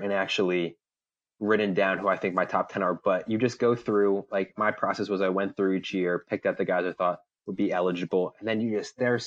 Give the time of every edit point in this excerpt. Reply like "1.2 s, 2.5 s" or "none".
none